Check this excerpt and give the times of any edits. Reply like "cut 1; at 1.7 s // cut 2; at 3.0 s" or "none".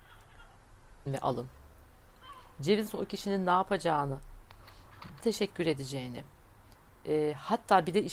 cut 1; at 1.1 s // cut 2; at 2.9 s // cut 3; at 5.2 s